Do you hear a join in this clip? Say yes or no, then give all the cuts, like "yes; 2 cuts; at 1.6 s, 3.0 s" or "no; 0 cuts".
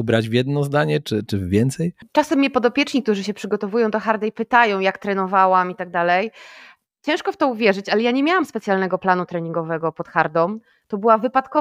no; 0 cuts